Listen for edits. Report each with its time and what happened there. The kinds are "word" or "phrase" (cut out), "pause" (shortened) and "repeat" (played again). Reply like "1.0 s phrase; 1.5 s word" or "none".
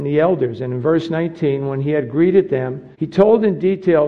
2.9 s pause